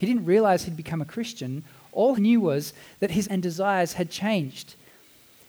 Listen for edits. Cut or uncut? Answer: cut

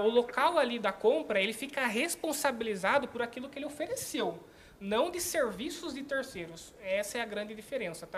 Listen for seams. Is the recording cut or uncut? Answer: uncut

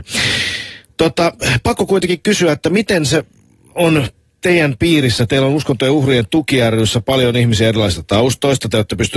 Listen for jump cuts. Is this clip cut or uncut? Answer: uncut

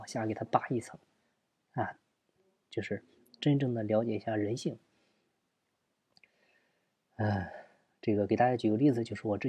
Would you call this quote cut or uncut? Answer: uncut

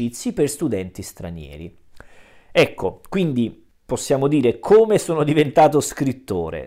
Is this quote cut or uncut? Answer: cut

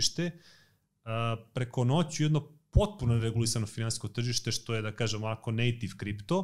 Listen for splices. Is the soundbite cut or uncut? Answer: uncut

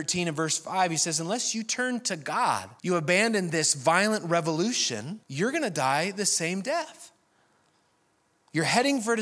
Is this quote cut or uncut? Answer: cut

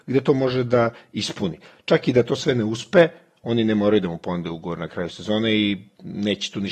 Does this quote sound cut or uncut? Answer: uncut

